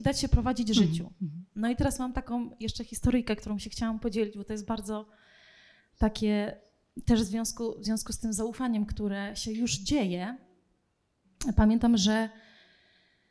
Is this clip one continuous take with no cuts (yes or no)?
yes